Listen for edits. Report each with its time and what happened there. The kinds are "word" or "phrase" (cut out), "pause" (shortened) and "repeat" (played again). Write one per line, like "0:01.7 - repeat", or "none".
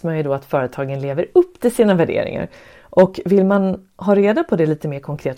none